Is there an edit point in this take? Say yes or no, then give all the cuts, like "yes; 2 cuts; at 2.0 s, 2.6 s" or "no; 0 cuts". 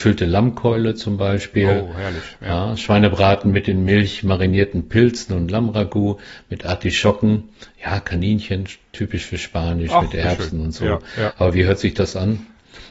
no; 0 cuts